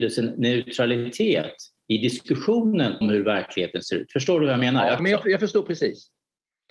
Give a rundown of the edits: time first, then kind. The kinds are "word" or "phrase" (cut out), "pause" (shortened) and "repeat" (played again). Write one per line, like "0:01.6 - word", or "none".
0:03.0 - word
0:05.0 - phrase